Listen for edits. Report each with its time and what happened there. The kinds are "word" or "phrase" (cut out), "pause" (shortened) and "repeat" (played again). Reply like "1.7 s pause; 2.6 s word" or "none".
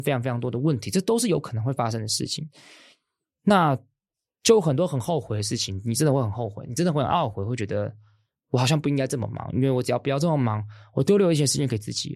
none

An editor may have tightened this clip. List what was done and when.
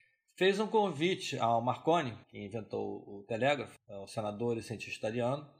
2.2 s pause; 3.8 s word

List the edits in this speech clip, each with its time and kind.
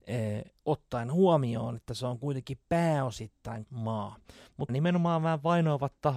3.7 s word; 4.7 s word

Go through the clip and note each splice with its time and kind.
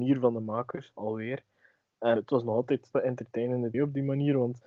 2.2 s word; 2.9 s word; 3.7 s word

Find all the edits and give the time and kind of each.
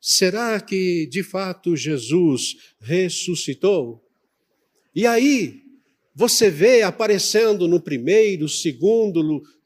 none

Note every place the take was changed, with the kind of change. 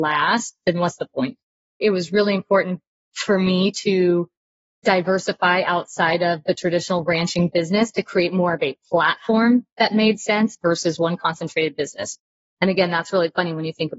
none

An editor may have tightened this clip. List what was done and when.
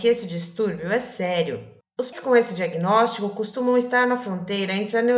2.1 s word

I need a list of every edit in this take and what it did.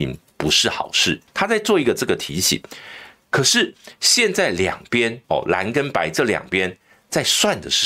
1.3 s pause; 5.2 s pause

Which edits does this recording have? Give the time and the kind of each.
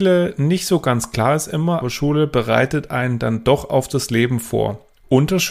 1.8 s word

